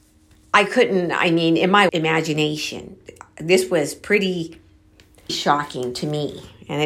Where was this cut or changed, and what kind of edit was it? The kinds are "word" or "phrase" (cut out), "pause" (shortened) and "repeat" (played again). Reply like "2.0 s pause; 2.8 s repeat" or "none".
1.9 s word; 5.3 s word